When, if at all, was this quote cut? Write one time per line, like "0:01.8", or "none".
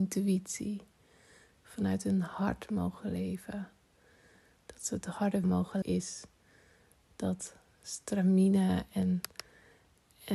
0:05.4
0:05.8